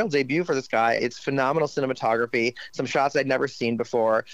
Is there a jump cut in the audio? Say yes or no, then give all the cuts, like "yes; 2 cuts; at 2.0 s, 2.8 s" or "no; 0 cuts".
yes; 1 cut; at 1.0 s